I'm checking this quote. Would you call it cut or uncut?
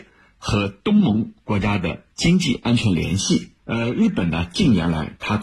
cut